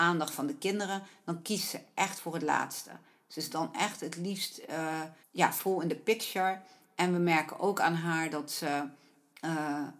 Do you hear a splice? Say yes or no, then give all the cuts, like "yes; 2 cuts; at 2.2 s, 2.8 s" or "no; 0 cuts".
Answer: yes; 1 cut; at 5.2 s